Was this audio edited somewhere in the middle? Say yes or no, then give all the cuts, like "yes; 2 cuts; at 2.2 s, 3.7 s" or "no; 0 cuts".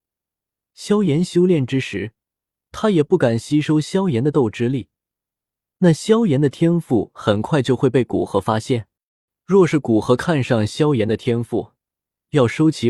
no; 0 cuts